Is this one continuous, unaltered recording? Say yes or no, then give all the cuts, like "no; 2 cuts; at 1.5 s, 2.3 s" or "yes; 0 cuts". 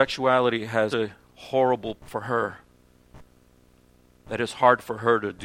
no; 2 cuts; at 0.9 s, 2.0 s